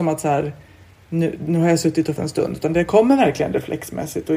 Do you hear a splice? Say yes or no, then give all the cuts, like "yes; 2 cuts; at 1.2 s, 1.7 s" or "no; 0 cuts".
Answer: yes; 1 cut; at 2.2 s